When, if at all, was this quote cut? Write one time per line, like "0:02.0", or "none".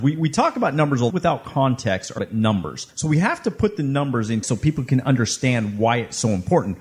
0:01.1
0:02.2
0:02.9
0:04.4